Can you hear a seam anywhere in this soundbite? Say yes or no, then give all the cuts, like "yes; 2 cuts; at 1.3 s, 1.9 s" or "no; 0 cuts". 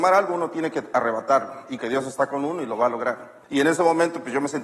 yes; 2 cuts; at 1.8 s, 3.4 s